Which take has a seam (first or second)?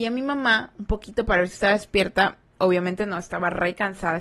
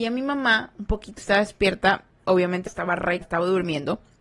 second